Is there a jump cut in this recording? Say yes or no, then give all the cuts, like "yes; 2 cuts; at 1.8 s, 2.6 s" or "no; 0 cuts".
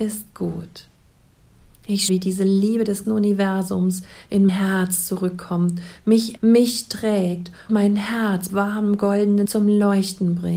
yes; 7 cuts; at 2.1 s, 3.0 s, 4.5 s, 6.4 s, 7.7 s, 8.5 s, 9.5 s